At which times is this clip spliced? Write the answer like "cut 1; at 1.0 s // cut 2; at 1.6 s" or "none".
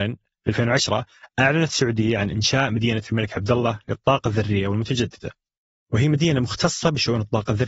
none